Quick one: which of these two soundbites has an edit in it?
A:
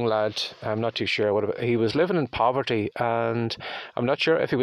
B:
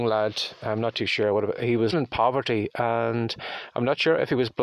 B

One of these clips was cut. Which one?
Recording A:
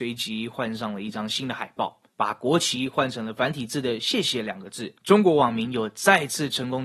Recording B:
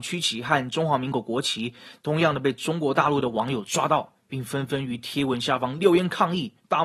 A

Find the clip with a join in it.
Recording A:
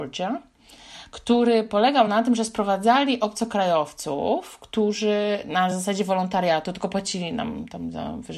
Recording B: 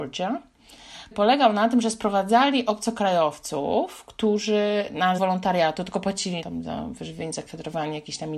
B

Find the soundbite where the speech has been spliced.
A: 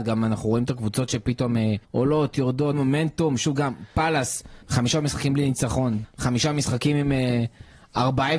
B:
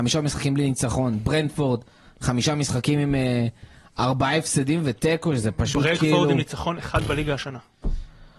A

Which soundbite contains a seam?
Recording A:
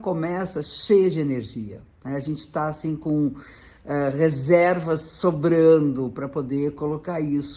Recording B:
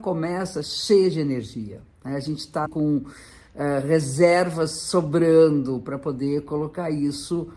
B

